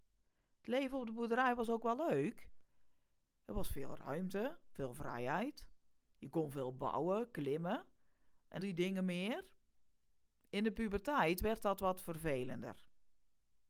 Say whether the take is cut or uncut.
cut